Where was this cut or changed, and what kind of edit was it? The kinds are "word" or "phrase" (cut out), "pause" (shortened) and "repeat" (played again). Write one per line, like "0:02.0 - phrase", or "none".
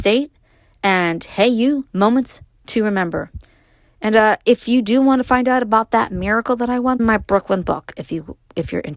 0:01.9 - pause
0:07.0 - phrase

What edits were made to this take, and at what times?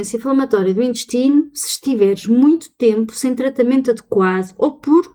none

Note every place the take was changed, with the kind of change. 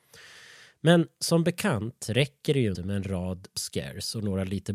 0:02.7 - word
0:03.5 - word

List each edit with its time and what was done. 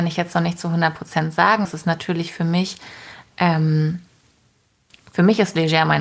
0:01.6 - word

